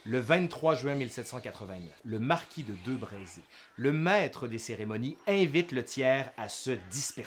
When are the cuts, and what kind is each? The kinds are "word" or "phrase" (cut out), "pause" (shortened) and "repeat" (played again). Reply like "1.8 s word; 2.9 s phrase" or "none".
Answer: 2.0 s pause